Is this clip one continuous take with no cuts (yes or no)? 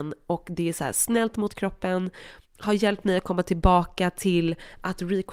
no